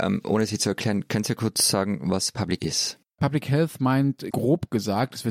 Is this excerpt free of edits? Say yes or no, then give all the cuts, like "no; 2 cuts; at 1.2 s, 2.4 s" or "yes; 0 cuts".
no; 2 cuts; at 2.6 s, 4.3 s